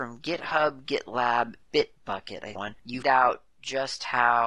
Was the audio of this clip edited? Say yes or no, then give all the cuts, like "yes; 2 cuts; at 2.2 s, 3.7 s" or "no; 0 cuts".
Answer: yes; 3 cuts; at 1.6 s, 2.6 s, 3.0 s